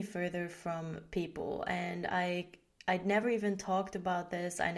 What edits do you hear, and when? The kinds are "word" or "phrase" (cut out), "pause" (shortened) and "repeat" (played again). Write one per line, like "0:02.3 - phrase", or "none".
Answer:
none